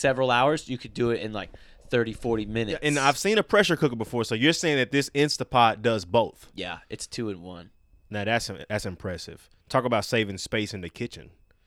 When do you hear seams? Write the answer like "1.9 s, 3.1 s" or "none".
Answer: none